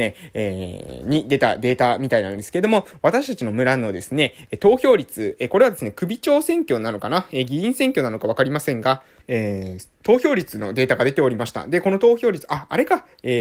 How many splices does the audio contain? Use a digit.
1